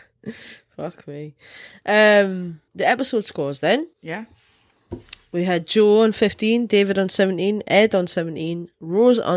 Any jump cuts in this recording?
yes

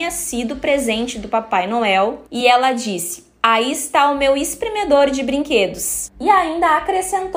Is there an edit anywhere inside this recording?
no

